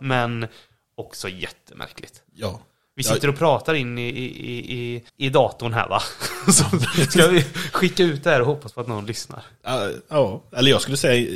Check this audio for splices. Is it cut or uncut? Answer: cut